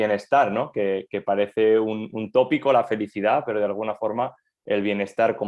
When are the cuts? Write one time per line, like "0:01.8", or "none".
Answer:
none